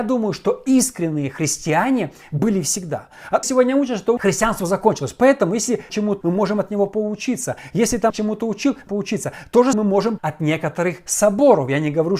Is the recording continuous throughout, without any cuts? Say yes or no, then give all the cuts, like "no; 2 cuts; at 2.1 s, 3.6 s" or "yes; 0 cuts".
no; 8 cuts; at 3.4 s, 4.2 s, 5.9 s, 6.2 s, 8.1 s, 8.9 s, 9.7 s, 10.2 s